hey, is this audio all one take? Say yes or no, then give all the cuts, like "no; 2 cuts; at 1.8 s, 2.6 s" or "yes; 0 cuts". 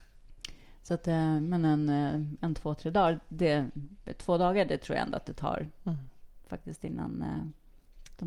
yes; 0 cuts